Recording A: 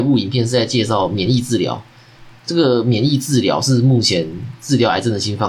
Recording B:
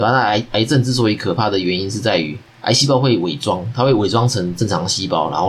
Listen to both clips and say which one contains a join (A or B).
B